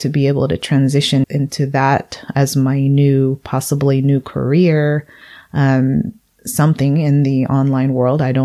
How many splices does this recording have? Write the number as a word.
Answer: one